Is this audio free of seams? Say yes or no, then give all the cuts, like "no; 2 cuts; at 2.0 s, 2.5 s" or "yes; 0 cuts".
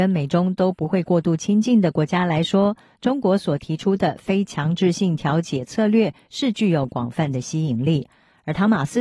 yes; 0 cuts